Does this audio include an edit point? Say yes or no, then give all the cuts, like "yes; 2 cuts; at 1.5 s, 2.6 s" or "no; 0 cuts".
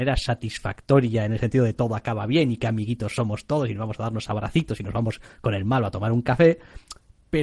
no; 0 cuts